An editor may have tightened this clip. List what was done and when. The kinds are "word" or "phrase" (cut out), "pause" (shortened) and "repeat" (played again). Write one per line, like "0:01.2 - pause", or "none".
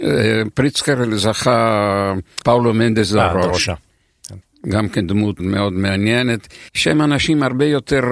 0:02.4 - word
0:05.4 - word
0:06.7 - pause